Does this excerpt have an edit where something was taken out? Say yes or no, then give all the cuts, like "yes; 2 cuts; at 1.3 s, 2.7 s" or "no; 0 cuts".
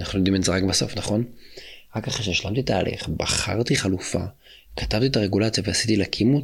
no; 0 cuts